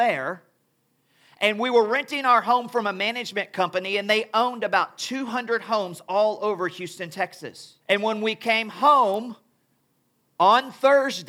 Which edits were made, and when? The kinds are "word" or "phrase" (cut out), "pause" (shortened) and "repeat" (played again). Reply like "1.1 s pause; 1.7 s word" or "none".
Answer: 7.8 s pause